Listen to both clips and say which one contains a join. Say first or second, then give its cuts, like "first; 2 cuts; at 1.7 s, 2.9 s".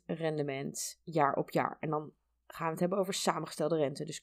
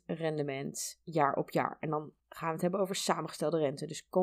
second; 1 cut; at 2.2 s